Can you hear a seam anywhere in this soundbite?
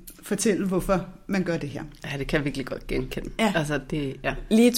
no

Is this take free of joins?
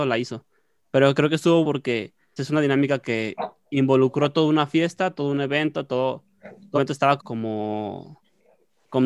no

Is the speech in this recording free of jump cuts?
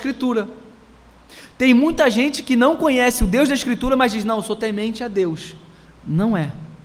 yes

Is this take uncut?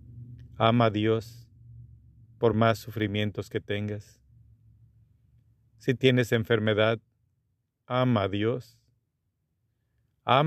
yes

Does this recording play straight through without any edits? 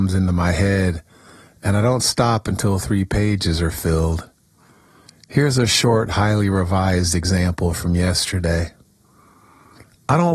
yes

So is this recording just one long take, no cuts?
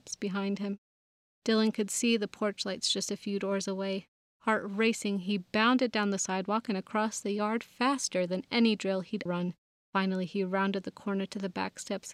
no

